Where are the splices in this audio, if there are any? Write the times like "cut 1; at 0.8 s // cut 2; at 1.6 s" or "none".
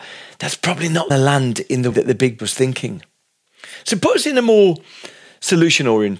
cut 1; at 1.1 s // cut 2; at 1.9 s // cut 3; at 2.4 s